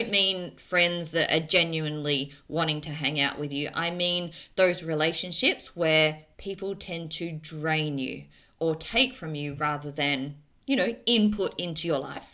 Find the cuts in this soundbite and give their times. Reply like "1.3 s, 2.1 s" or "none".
none

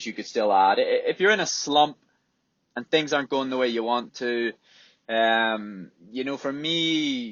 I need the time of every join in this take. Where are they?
none

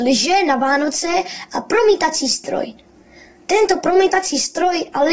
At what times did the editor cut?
none

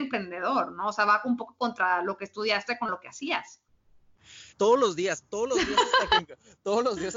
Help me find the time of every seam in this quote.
4.5 s, 5.3 s

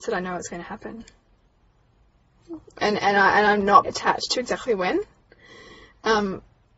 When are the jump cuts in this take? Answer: 3.8 s

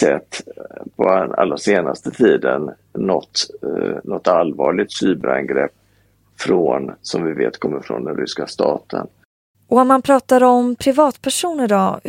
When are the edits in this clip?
none

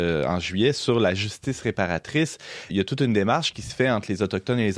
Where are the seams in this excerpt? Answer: 2.7 s

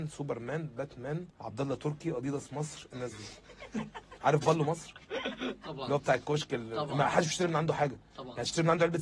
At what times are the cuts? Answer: 1.3 s

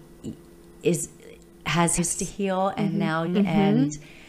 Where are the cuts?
2.0 s, 3.3 s

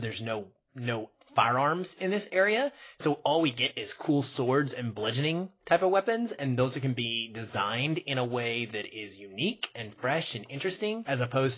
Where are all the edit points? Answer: none

